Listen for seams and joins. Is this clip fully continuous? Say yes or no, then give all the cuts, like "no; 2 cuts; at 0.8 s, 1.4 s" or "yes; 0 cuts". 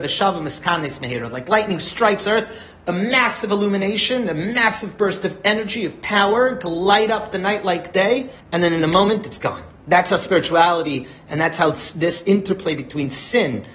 no; 2 cuts; at 8.4 s, 9.8 s